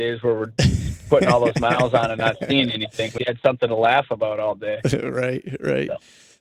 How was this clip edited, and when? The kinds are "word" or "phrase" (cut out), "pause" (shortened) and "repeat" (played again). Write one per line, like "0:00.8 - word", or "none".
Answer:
0:03.2 - word